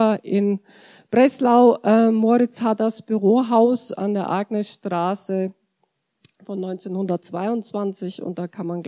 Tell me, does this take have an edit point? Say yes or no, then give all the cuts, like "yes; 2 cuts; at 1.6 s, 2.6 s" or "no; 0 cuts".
no; 0 cuts